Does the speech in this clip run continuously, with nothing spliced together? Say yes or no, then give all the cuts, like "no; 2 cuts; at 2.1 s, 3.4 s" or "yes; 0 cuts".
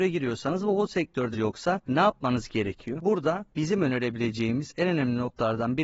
no; 1 cut; at 1.3 s